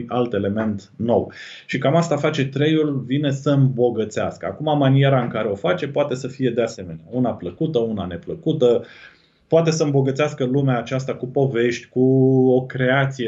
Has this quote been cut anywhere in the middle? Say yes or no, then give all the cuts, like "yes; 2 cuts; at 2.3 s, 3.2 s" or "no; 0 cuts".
no; 0 cuts